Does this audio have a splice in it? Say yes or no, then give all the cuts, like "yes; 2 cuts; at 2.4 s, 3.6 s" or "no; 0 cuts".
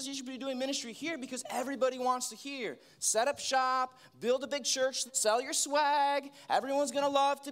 yes; 1 cut; at 5.1 s